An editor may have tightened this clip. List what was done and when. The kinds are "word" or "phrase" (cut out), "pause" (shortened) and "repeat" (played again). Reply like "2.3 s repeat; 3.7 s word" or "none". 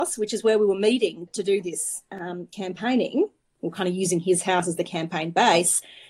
1.3 s word